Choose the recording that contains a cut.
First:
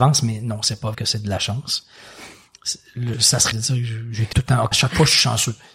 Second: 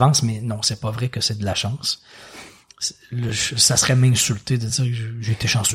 first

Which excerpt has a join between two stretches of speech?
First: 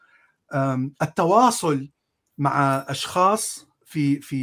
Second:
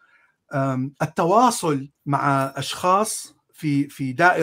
second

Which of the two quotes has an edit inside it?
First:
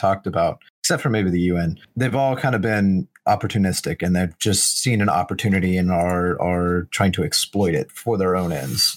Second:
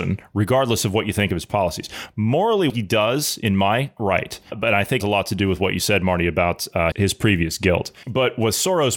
second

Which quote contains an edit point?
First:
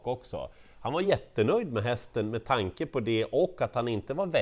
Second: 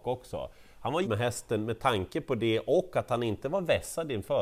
second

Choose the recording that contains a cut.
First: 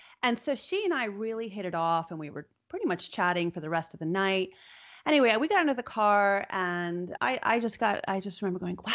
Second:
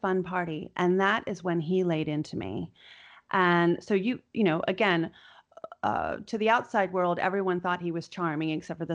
first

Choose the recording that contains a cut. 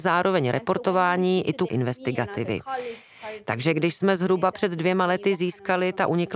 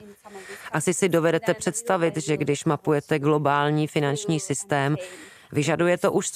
first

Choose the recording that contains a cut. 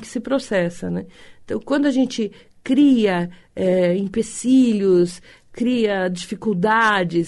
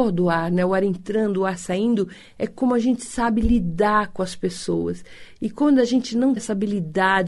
second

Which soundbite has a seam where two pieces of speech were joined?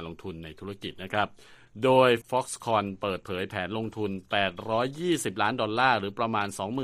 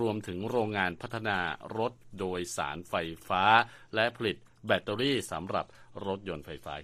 first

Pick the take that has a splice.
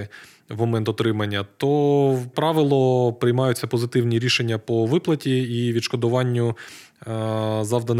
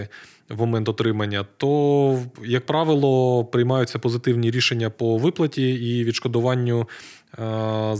first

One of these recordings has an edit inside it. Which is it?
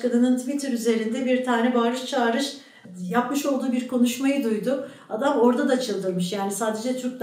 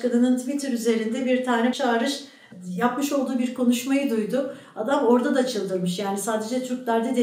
second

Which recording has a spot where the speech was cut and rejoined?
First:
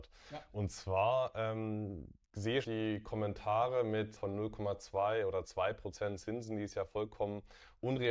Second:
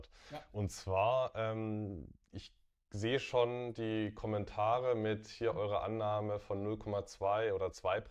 first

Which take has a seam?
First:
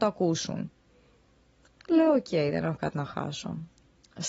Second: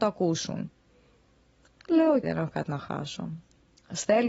second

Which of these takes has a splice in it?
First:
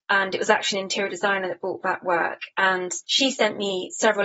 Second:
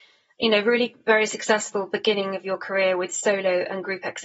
first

